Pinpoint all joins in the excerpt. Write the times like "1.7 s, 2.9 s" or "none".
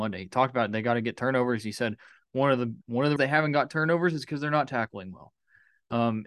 2.8 s, 3.2 s